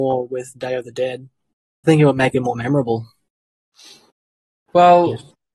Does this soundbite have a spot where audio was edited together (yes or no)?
yes